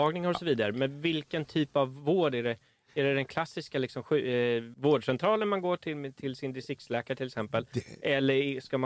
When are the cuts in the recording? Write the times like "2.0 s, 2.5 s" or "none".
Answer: none